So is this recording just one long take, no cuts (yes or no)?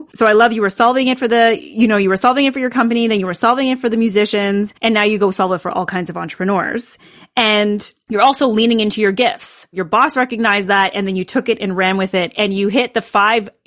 no